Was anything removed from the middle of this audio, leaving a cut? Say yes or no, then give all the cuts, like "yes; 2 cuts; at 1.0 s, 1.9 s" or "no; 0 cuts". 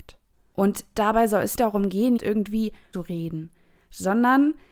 yes; 3 cuts; at 1.6 s, 2.2 s, 2.9 s